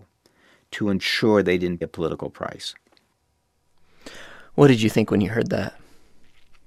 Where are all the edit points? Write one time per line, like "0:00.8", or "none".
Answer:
0:01.8